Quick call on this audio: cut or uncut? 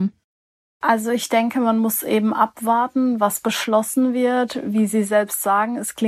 uncut